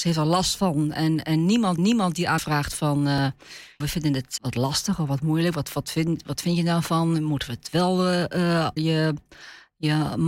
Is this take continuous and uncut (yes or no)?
no